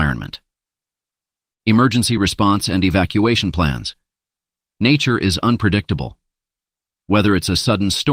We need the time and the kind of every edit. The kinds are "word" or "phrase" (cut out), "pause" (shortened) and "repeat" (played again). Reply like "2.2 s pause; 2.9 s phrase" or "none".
none